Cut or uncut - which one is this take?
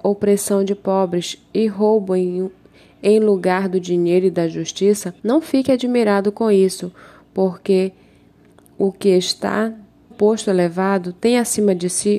cut